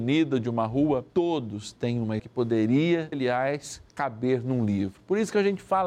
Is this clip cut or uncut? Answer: cut